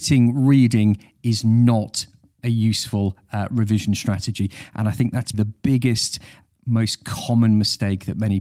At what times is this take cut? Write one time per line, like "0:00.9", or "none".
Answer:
0:05.3